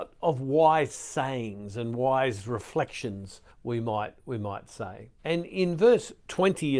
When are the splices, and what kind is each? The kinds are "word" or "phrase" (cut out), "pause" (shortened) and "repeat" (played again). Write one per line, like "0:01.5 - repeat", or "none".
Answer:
0:03.5 - pause
0:05.2 - pause